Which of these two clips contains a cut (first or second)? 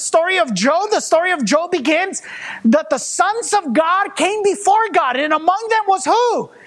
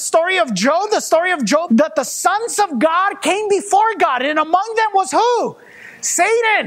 second